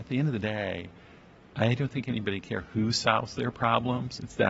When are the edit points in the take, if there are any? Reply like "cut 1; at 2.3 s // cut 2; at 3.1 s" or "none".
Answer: none